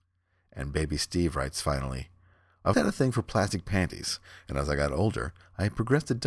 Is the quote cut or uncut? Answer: cut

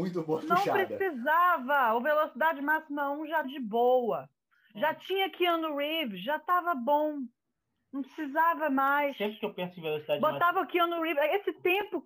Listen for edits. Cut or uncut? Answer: cut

